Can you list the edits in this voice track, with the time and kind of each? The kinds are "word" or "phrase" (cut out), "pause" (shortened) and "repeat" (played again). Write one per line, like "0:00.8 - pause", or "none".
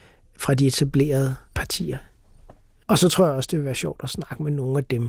0:01.4 - pause